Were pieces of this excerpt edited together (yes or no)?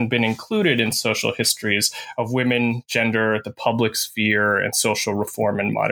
no